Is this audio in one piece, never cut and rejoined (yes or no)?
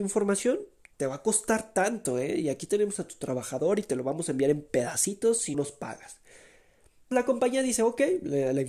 no